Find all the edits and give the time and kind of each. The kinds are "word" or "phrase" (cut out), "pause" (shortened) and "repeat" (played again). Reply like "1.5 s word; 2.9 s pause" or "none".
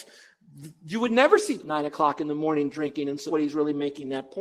1.6 s word; 3.3 s word